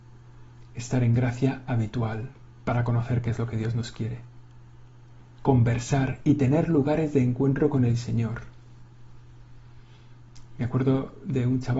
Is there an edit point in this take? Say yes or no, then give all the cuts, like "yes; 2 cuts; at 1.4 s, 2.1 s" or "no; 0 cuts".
no; 0 cuts